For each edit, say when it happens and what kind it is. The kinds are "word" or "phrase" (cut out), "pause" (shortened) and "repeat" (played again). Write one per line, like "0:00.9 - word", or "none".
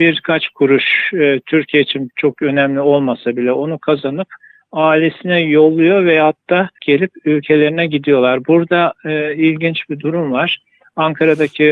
0:06.8 - phrase